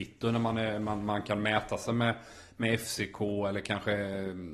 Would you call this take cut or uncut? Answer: uncut